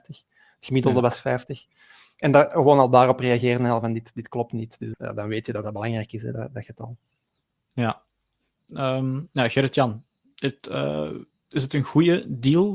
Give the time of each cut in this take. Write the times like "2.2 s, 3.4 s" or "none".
4.9 s